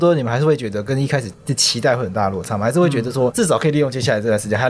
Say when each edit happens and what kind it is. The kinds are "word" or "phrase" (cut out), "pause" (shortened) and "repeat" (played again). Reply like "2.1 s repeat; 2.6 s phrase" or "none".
3.3 s word